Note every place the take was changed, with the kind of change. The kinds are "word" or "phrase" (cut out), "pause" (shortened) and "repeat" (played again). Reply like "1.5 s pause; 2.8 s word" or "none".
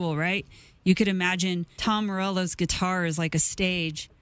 1.8 s word